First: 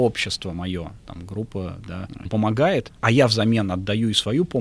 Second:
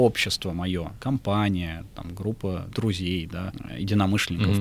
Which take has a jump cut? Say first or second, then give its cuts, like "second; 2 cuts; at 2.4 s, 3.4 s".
first; 3 cuts; at 1.0 s, 1.8 s, 2.3 s